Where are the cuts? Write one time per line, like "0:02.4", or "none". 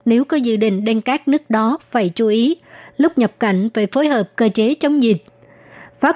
none